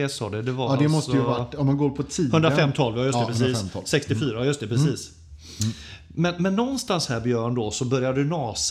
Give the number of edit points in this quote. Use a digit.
0